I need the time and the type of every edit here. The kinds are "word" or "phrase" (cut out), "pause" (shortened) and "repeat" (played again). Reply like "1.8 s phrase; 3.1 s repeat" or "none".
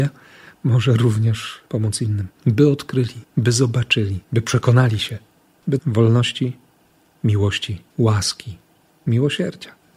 1.7 s pause; 2.4 s pause; 3.2 s pause; 4.2 s pause; 5.8 s word; 7.9 s pause

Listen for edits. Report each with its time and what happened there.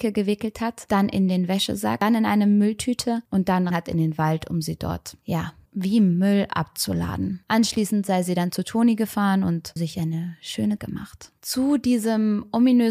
3.7 s word; 5.7 s word; 9.8 s word; 10.8 s word

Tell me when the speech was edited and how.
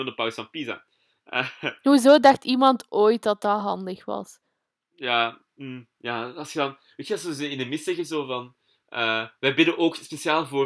none

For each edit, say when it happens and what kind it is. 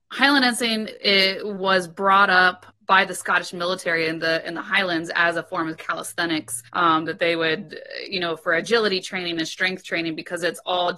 2.7 s word; 6.7 s pause

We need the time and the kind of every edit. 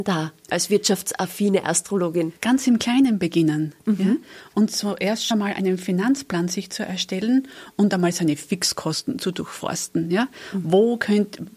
2.4 s pause; 5.3 s word

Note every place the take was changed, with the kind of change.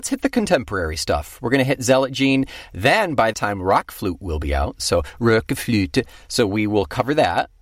3.3 s word

